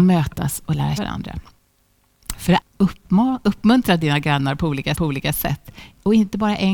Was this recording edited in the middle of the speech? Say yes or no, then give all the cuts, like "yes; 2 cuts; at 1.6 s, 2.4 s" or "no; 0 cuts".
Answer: yes; 3 cuts; at 1.0 s, 2.6 s, 4.9 s